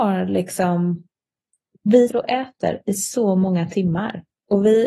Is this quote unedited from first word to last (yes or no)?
no